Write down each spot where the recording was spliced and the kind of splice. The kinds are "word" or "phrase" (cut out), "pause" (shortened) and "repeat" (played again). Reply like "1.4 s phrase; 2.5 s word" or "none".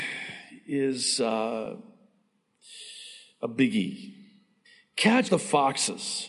5.3 s word